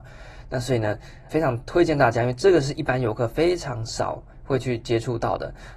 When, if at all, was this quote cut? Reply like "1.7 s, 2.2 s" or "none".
1.3 s